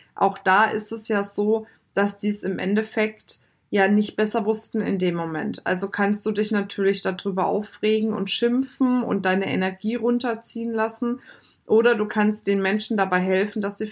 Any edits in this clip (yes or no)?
no